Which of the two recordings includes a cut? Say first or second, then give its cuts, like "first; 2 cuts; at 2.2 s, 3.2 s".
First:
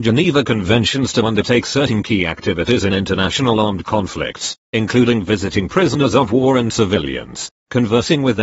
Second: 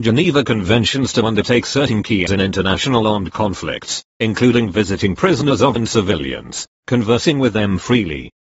second; 2 cuts; at 2.3 s, 5.8 s